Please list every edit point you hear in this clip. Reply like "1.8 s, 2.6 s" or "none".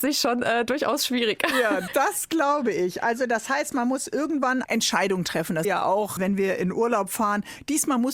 1.9 s, 4.6 s, 5.6 s, 6.2 s